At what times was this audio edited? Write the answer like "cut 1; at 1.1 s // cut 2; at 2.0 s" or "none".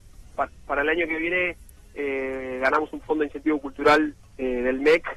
none